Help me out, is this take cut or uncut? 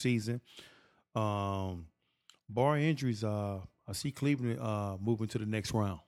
uncut